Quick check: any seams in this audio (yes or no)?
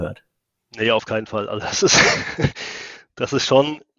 no